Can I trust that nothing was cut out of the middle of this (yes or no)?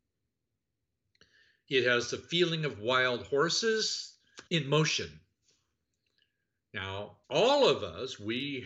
no